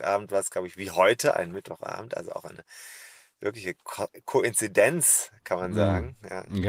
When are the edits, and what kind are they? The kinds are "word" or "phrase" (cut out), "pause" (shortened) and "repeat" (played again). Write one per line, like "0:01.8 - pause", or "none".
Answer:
none